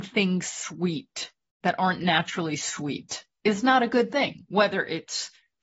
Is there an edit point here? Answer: no; 0 cuts

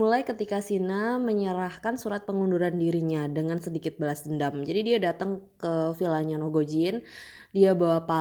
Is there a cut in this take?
no; 0 cuts

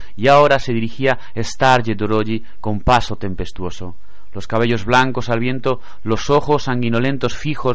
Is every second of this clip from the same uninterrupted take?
yes; 0 cuts

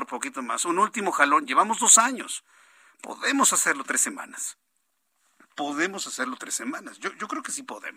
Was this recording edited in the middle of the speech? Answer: no; 0 cuts

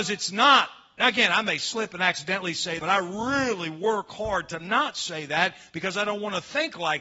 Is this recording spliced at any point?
yes; 1 cut; at 2.8 s

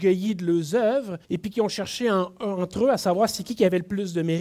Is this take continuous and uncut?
no; 1 cut; at 1.2 s

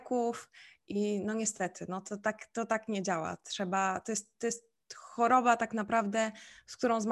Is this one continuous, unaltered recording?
yes; 0 cuts

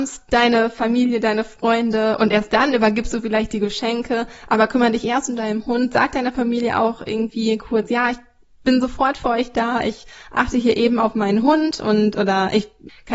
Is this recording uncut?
yes; 0 cuts

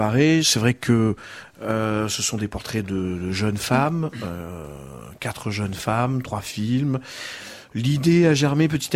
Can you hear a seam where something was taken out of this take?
no; 0 cuts

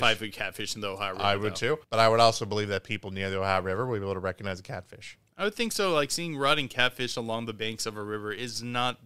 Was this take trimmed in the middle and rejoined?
yes; 1 cut; at 1.8 s

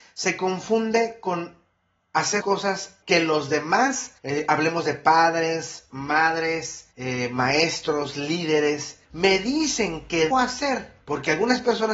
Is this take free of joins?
no; 7 cuts; at 2.4 s, 3.0 s, 4.2 s, 6.9 s, 9.0 s, 10.3 s, 11.0 s

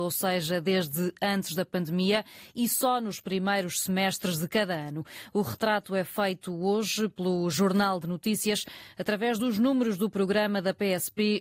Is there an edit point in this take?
no; 0 cuts

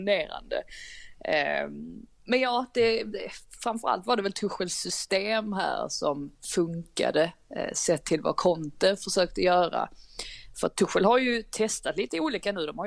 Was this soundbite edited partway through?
yes; 1 cut; at 6.4 s

